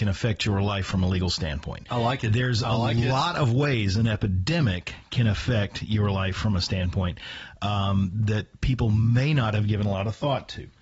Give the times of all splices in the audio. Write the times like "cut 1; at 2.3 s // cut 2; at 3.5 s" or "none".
none